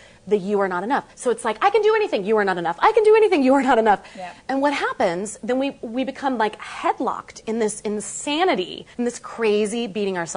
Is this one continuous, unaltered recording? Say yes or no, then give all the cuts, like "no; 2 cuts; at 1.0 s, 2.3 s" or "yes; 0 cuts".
no; 2 cuts; at 1.1 s, 8.9 s